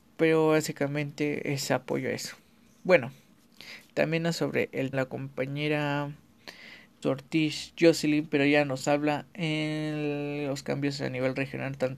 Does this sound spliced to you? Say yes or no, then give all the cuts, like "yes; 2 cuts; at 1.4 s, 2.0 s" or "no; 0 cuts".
yes; 3 cuts; at 4.3 s, 4.9 s, 7.0 s